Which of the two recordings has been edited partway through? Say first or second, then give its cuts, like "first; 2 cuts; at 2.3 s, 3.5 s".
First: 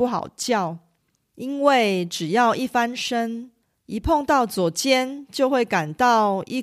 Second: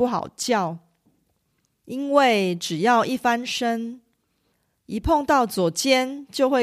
first; 2 cuts; at 1.0 s, 3.6 s